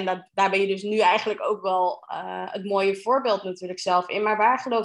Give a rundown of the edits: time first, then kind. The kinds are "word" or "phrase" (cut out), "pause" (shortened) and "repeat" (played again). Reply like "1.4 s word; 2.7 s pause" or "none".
none